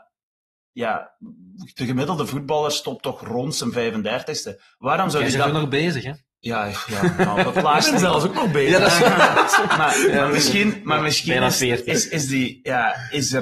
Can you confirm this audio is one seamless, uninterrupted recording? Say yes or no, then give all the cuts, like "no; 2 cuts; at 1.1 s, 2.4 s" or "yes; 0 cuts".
yes; 0 cuts